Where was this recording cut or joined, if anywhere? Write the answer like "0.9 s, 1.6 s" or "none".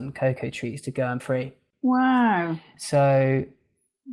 1.2 s